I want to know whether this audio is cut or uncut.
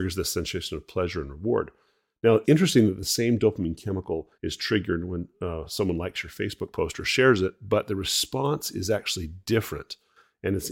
cut